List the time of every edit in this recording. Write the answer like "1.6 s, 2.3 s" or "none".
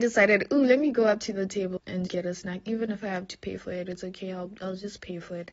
1.8 s, 2.1 s